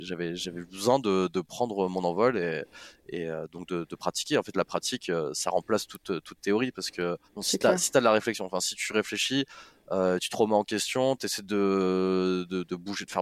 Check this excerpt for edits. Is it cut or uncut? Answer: uncut